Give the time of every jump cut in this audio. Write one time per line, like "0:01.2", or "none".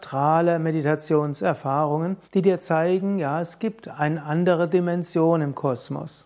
0:02.2